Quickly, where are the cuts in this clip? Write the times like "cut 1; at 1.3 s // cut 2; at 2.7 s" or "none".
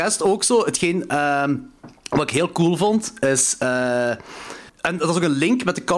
cut 1; at 2.0 s // cut 2; at 4.7 s